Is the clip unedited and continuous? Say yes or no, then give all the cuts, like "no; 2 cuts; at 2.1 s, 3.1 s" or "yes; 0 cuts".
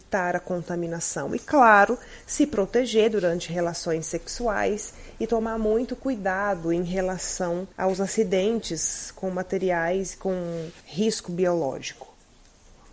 no; 2 cuts; at 7.7 s, 10.8 s